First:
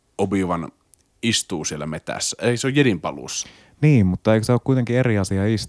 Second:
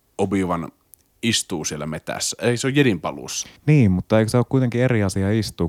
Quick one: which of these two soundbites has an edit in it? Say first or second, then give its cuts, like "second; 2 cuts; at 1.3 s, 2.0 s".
second; 1 cut; at 3.6 s